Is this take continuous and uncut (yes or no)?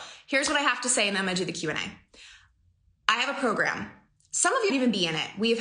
no